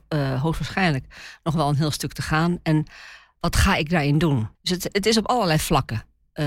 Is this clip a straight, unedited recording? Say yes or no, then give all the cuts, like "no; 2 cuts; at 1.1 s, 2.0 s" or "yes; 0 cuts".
no; 1 cut; at 4.5 s